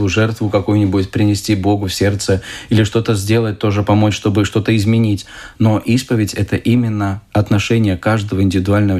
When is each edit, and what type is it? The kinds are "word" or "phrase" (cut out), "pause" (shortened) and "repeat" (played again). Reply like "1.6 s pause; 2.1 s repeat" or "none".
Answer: 7.3 s pause